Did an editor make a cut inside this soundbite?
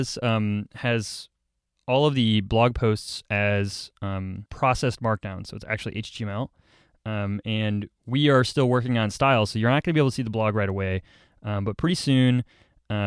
no; 0 cuts

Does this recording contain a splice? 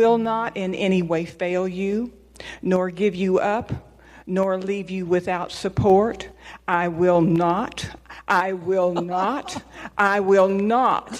no; 0 cuts

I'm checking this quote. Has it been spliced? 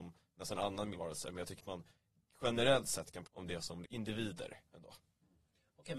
yes; 4 cuts; at 0.9 s, 1.6 s, 3.2 s, 3.8 s

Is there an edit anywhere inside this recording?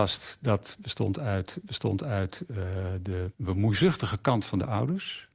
yes; 2 cuts; at 1.6 s, 3.3 s

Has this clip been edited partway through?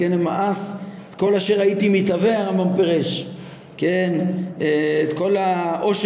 no; 0 cuts

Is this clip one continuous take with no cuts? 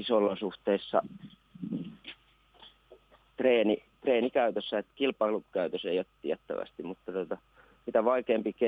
yes; 0 cuts

